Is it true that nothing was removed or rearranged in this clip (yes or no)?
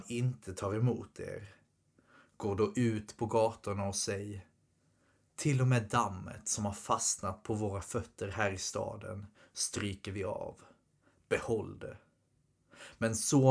yes